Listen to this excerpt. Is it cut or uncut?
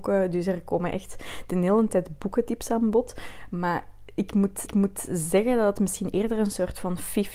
cut